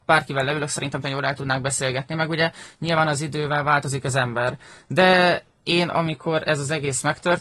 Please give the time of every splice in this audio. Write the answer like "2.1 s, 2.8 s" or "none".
1.0 s